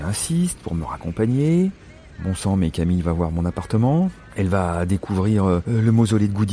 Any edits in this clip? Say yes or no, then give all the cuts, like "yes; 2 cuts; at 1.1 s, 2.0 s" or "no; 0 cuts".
yes; 1 cut; at 2.1 s